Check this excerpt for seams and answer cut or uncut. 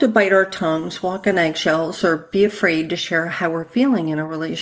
uncut